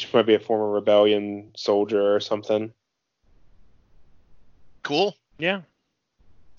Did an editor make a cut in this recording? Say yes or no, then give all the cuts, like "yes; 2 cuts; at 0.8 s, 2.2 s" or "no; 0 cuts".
yes; 1 cut; at 5.3 s